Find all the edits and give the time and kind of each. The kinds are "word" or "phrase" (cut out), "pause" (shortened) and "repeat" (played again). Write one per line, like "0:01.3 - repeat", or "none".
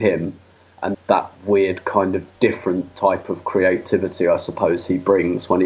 0:00.9 - word